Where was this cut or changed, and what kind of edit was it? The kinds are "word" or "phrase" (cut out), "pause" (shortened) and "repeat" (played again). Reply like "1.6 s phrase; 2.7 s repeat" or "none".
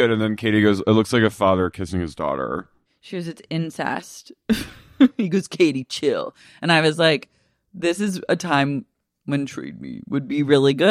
none

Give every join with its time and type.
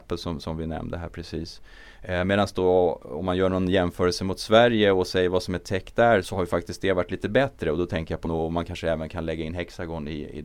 6.2 s word; 8.3 s word

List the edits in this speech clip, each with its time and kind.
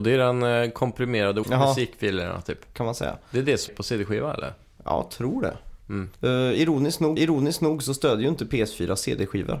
1.4 s word; 3.7 s word; 6.1 s pause; 7.2 s repeat

